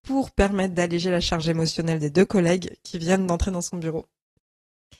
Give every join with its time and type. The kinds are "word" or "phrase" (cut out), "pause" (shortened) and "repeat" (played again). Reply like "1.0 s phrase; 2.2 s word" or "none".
none